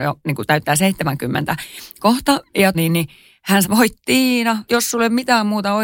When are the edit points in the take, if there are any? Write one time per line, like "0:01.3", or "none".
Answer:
0:02.7
0:03.6
0:04.7